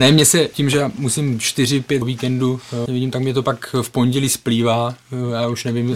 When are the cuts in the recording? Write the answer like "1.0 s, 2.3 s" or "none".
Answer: 2.0 s, 2.9 s